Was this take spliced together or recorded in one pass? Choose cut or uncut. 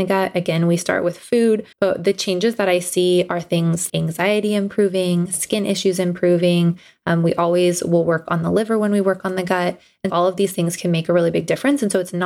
cut